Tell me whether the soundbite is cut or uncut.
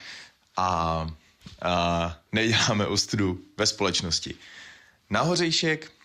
uncut